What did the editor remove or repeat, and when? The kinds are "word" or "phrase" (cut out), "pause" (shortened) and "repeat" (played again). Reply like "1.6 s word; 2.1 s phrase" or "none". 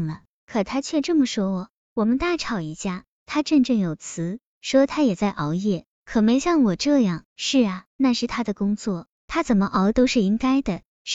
7.3 s pause; 7.9 s pause